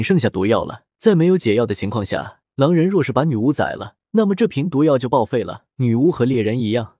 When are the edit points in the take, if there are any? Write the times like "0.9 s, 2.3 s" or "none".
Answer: 0.9 s, 2.5 s, 4.0 s, 5.7 s